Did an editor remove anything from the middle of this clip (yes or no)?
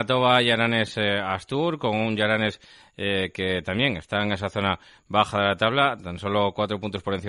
no